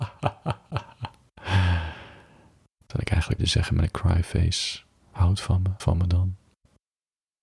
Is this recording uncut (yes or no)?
no